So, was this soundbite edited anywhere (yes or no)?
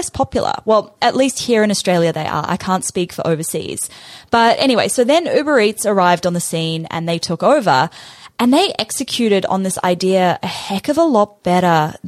no